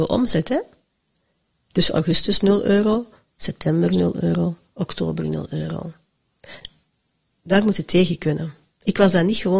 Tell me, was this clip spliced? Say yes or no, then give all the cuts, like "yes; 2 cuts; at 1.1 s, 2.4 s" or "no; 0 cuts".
no; 0 cuts